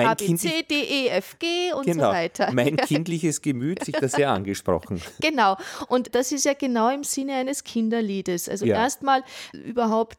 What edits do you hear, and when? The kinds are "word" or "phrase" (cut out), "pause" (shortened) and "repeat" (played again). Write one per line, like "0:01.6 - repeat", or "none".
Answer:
0:03.8 - word